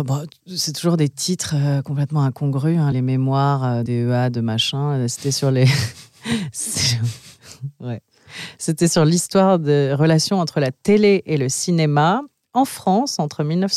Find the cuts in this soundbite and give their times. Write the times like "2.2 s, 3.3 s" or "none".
2.9 s, 3.9 s